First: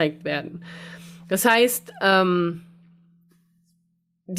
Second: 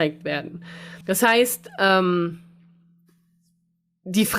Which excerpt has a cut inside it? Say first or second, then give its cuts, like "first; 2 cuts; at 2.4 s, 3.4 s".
second; 1 cut; at 1.0 s